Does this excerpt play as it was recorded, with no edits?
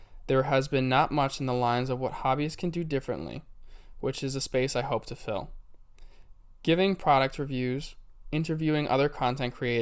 yes; 0 cuts

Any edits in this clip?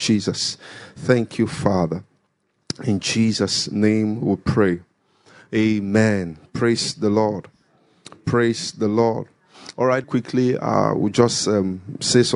yes; 1 cut; at 10.0 s

